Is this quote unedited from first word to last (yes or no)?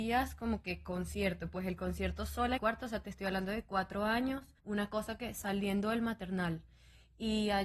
no